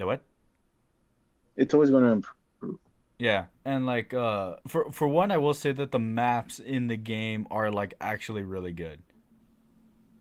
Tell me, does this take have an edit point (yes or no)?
yes